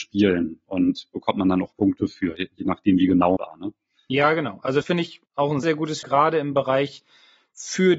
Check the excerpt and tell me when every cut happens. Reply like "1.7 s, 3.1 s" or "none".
3.4 s, 4.8 s, 5.3 s, 5.6 s, 6.0 s